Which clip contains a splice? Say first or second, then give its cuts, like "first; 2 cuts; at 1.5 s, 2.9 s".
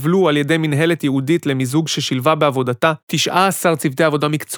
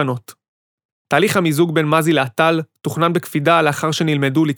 first; 1 cut; at 3.0 s